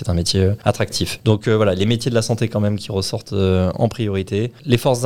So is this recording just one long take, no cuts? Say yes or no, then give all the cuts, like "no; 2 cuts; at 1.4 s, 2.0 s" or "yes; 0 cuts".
yes; 0 cuts